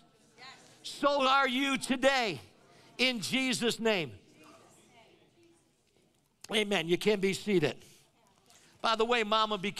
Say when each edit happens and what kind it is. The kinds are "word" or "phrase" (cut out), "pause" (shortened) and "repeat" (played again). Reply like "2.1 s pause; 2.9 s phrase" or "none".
none